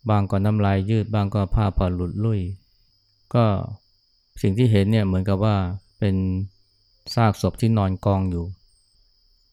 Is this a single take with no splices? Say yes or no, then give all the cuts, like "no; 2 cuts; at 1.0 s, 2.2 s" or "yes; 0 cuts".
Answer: no; 3 cuts; at 2.9 s, 4.0 s, 5.9 s